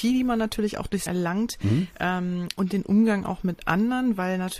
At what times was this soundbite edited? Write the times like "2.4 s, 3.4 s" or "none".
1.1 s